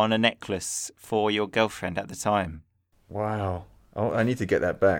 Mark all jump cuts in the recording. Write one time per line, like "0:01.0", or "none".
none